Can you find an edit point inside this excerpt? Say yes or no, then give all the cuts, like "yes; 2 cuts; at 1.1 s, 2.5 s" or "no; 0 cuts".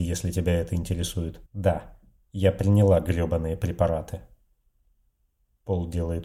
yes; 1 cut; at 1.5 s